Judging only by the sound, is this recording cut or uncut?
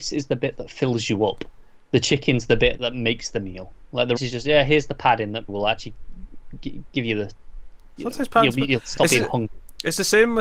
cut